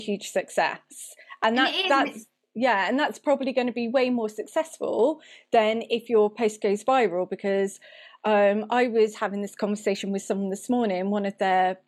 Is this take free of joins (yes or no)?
yes